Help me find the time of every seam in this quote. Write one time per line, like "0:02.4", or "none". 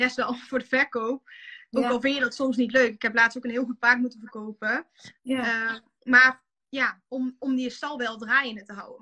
none